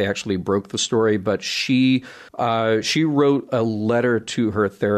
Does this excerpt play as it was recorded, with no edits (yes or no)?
no